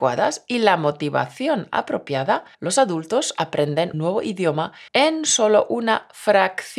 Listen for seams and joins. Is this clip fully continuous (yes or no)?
no